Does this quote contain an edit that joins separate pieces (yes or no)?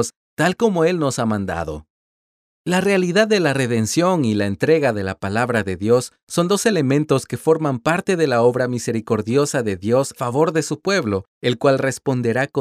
yes